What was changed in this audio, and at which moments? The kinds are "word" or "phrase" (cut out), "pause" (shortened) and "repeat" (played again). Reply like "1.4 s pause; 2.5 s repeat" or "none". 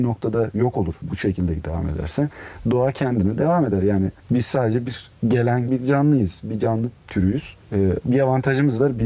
5.7 s word